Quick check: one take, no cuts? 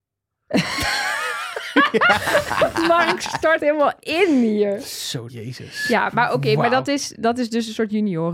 no; 2 cuts; at 3.6 s, 5.3 s

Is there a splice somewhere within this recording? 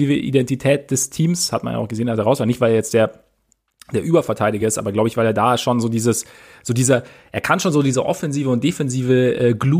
no; 0 cuts

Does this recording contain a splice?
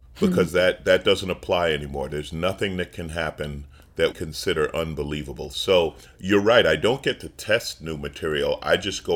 yes; 2 cuts; at 4.1 s, 6.0 s

